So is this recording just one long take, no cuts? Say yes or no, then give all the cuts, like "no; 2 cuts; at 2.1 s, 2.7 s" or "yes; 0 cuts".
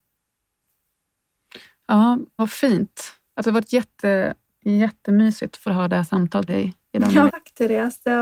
no; 3 cuts; at 2.4 s, 6.5 s, 7.3 s